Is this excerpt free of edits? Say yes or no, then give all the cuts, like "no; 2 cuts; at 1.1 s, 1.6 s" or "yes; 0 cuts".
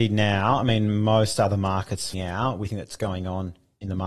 no; 2 cuts; at 2.1 s, 2.7 s